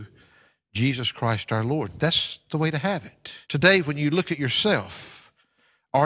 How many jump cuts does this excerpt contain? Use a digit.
1